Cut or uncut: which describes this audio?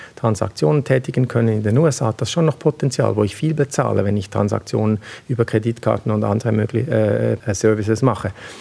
uncut